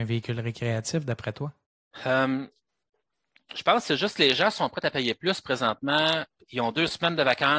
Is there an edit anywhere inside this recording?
no; 0 cuts

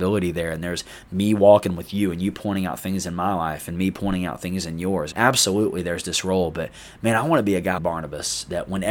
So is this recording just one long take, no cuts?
no; 2 cuts; at 5.1 s, 7.8 s

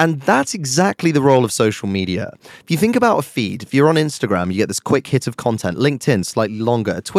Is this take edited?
no; 0 cuts

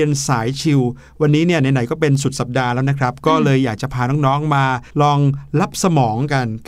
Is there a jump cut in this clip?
yes; 1 cut; at 4.9 s

